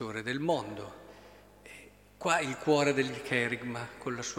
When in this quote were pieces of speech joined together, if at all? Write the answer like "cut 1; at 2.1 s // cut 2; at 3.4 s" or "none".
none